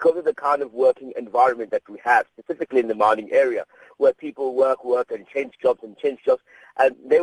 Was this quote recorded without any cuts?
yes; 0 cuts

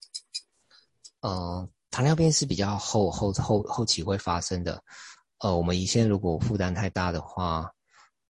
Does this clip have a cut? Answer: no; 0 cuts

